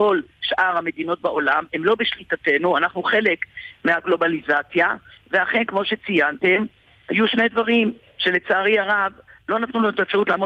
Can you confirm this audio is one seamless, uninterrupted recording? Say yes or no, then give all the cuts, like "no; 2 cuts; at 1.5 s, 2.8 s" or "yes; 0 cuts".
yes; 0 cuts